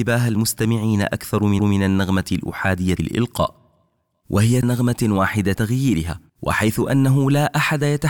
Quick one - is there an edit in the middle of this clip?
yes; 5 cuts; at 1.6 s, 3.0 s, 4.6 s, 5.6 s, 6.3 s

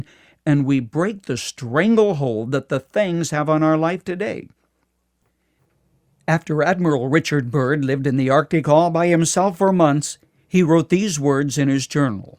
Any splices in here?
no; 0 cuts

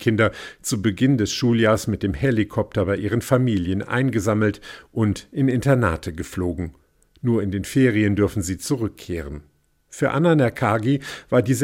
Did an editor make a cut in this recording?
no; 0 cuts

